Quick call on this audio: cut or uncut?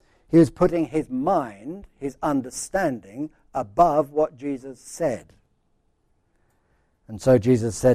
uncut